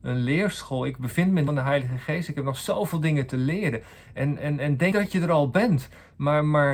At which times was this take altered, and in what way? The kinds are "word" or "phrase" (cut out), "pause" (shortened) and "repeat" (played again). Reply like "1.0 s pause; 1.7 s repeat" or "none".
1.5 s phrase; 4.9 s word